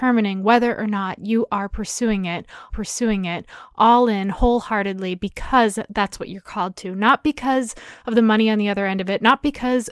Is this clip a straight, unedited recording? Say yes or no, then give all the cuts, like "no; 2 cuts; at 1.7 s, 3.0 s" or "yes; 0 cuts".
no; 1 cut; at 2.7 s